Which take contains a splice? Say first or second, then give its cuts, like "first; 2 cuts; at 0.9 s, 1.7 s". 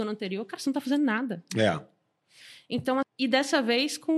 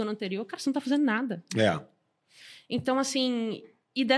first; 1 cut; at 3.0 s